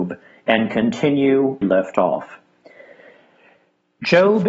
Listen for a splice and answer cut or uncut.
cut